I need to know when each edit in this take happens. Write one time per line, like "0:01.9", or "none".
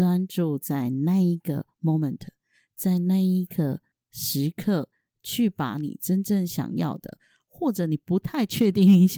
0:03.9